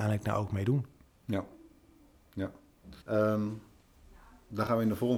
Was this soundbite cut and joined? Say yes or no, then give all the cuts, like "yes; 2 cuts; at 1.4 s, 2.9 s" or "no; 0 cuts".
yes; 1 cut; at 3.0 s